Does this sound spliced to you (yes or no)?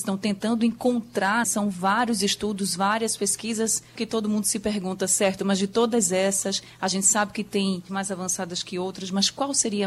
yes